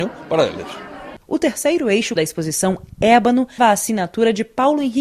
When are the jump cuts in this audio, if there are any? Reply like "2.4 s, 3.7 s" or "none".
2.2 s, 3.6 s